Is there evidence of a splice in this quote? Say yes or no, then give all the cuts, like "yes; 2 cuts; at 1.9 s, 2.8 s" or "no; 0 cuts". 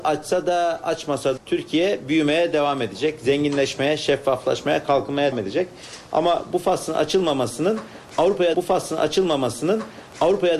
yes; 3 cuts; at 1.4 s, 5.3 s, 8.5 s